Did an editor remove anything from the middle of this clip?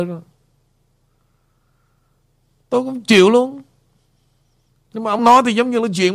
no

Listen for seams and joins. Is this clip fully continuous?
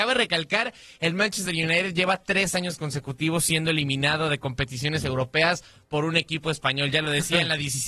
yes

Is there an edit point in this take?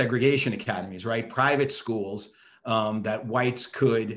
no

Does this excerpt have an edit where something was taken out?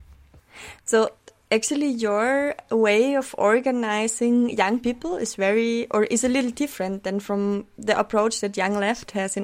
no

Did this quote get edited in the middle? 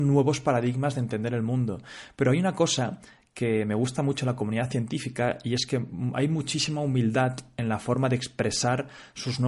no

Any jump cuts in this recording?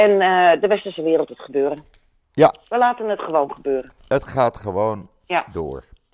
yes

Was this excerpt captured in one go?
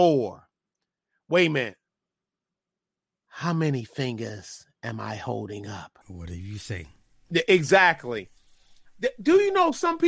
no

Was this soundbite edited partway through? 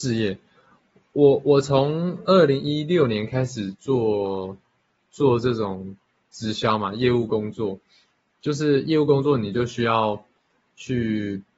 no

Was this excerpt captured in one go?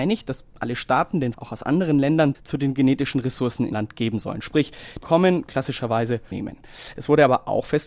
no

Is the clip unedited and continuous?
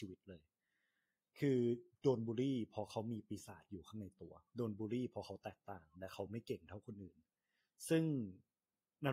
no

